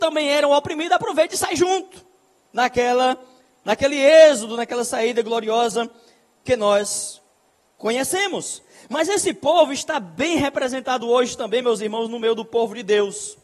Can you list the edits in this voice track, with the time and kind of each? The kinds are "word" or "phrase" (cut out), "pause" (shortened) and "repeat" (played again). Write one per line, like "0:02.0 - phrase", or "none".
none